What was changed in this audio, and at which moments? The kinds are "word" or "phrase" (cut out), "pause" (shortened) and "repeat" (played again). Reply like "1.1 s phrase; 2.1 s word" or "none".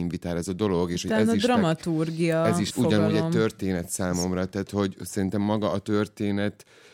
2.7 s word